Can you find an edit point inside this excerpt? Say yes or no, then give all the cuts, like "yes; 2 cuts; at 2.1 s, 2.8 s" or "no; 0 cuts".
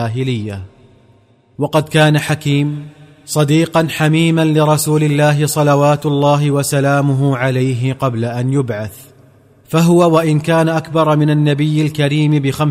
no; 0 cuts